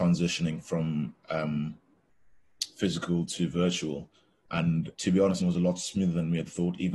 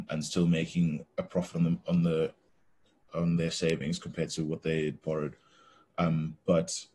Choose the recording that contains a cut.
first; 2 cuts; at 4.9 s, 5.4 s

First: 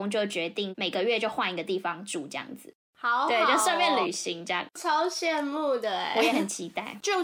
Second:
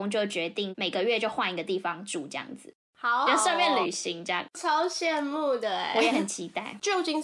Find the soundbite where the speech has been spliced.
second; 1 cut; at 3.3 s

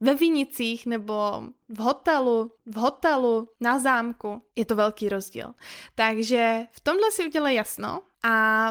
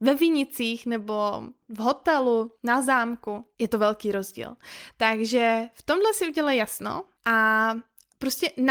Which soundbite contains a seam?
first; 1 cut; at 2.6 s

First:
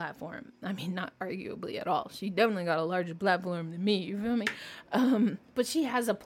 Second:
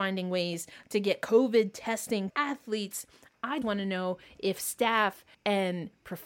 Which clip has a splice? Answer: second; 3 cuts; at 2.3 s, 3.6 s, 5.3 s

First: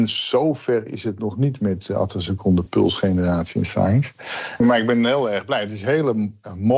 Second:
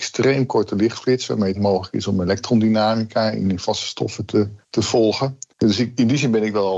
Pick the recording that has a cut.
second; 4 cuts; at 1.5 s, 3.4 s, 4.6 s, 5.5 s

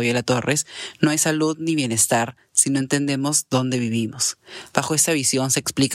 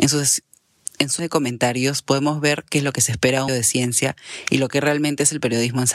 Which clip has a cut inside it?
second; 2 cuts; at 1.2 s, 3.5 s

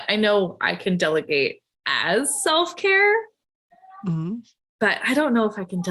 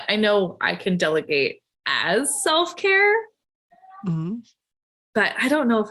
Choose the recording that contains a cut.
first; 1 cut; at 4.6 s

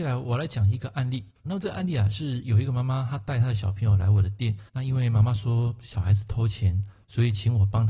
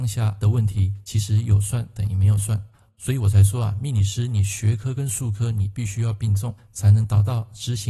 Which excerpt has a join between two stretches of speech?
first; 2 cuts; at 1.3 s, 4.7 s

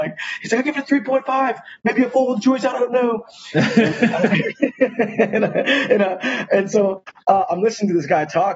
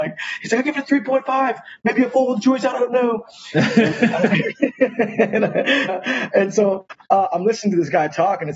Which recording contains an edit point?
second; 1 cut; at 5.9 s

